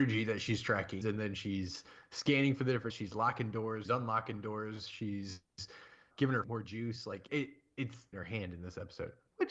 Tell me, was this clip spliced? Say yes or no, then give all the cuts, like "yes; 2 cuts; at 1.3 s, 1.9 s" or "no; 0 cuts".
yes; 7 cuts; at 1.0 s, 2.9 s, 3.8 s, 6.1 s, 6.4 s, 7.3 s, 8.1 s